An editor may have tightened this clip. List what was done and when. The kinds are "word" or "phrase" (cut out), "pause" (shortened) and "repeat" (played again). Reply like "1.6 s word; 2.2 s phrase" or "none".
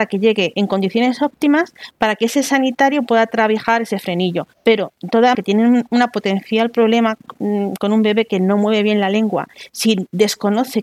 4.5 s pause; 5.3 s word